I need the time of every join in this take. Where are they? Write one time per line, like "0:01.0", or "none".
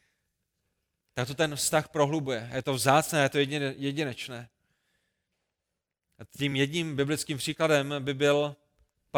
none